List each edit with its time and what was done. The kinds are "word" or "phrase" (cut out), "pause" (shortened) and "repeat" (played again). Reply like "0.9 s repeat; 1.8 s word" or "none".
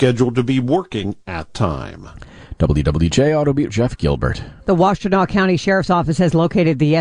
1.5 s word; 3.7 s word; 4.6 s pause